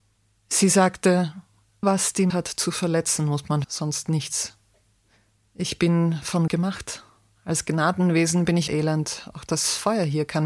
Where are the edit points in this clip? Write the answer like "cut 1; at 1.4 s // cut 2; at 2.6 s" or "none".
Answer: cut 1; at 1.8 s // cut 2; at 2.3 s // cut 3; at 3.6 s // cut 4; at 6.5 s // cut 5; at 8.7 s